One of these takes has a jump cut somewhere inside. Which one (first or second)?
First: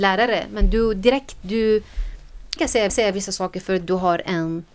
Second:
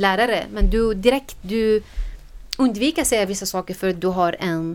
first